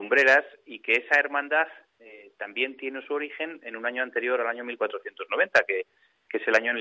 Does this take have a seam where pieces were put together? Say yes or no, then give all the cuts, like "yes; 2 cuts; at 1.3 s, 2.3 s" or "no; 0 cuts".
no; 0 cuts